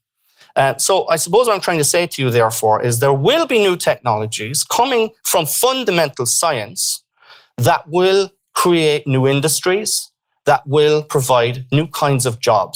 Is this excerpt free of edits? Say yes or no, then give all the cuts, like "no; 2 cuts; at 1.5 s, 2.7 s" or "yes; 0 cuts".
yes; 0 cuts